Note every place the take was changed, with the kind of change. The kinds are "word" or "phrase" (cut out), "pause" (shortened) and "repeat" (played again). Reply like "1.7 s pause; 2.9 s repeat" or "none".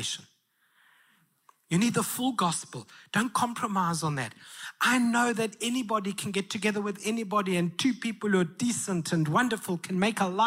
none